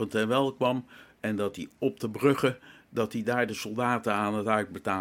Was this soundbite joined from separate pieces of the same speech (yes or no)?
no